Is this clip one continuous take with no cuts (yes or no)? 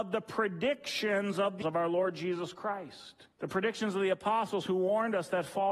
no